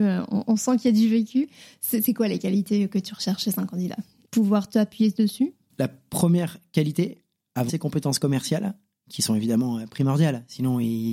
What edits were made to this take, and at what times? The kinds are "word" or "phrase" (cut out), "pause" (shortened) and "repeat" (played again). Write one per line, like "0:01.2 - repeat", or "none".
0:07.7 - word